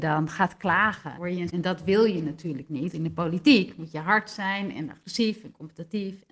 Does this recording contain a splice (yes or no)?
yes